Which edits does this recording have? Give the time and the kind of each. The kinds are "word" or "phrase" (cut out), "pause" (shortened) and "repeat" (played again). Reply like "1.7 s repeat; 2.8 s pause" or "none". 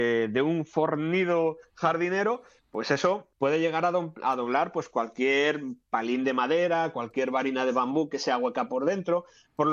3.3 s pause